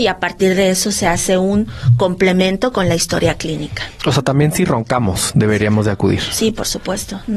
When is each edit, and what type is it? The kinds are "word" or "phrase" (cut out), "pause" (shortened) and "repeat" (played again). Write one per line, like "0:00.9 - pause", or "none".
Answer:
none